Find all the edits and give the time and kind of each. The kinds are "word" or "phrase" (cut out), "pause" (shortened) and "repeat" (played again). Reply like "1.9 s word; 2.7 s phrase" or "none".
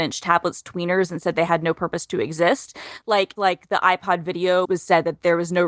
3.4 s word; 4.6 s word